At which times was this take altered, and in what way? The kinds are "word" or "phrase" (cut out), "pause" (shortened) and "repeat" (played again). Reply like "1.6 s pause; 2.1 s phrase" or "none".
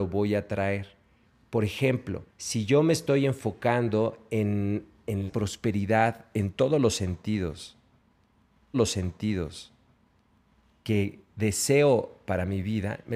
1.2 s pause; 2.3 s pause; 5.3 s phrase; 8.7 s repeat